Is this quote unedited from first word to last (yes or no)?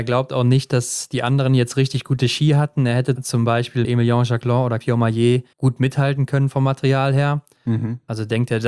no